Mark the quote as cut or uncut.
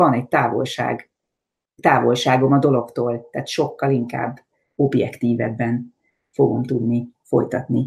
uncut